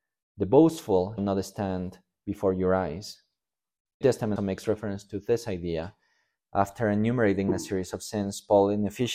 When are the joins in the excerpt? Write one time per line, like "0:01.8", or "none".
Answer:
0:01.2
0:04.0
0:04.4